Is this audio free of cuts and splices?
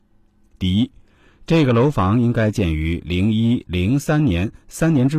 no; 1 cut; at 3.6 s

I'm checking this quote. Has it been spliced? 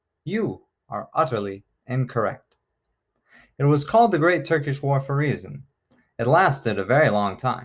no; 0 cuts

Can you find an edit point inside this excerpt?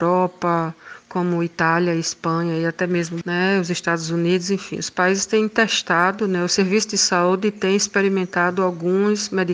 yes; 1 cut; at 3.2 s

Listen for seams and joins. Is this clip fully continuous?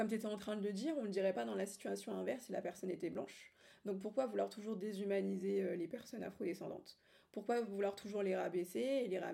yes; 0 cuts

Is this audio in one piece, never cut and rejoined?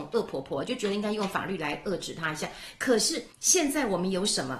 no; 1 cut; at 3.3 s

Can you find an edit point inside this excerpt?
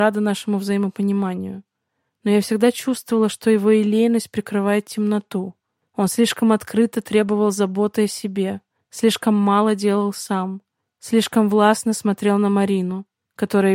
no; 0 cuts

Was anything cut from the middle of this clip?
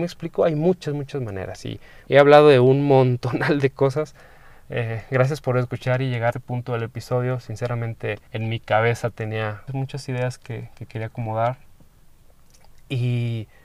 yes; 4 cuts; at 2.1 s, 6.3 s, 8.3 s, 9.7 s

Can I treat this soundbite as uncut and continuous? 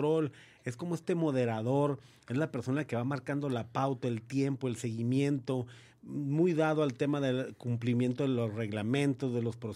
yes; 0 cuts

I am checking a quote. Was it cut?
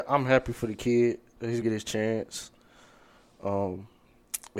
yes; 1 cut; at 1.6 s

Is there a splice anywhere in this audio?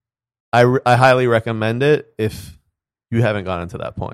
no; 0 cuts

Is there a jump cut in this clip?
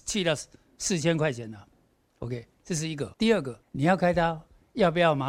yes; 2 cuts; at 3.1 s, 3.6 s

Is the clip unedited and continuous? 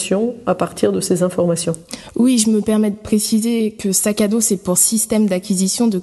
yes; 0 cuts

